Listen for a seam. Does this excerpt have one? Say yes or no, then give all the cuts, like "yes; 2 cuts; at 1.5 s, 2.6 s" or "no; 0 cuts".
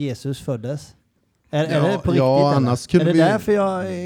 no; 0 cuts